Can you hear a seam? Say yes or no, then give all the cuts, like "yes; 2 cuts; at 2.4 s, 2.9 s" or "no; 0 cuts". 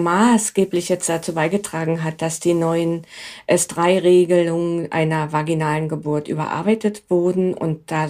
no; 0 cuts